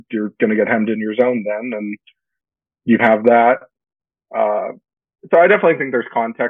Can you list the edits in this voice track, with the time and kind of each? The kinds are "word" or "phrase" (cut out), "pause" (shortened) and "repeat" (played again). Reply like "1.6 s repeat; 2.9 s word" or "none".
3.0 s word